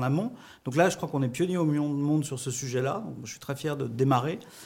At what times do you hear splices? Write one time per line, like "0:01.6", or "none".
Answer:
none

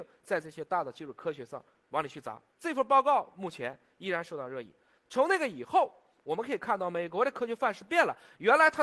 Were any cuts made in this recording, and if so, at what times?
0:02.5

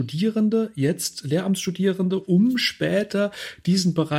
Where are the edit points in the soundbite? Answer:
none

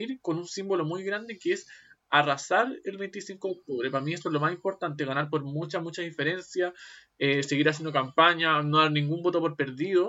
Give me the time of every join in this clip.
none

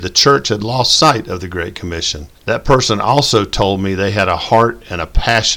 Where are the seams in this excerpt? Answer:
0:02.3

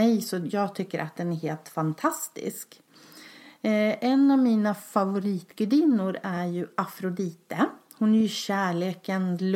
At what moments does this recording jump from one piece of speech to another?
none

